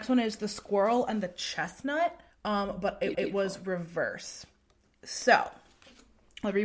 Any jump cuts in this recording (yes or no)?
yes